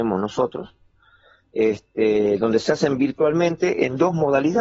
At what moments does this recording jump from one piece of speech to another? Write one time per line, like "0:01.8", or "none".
none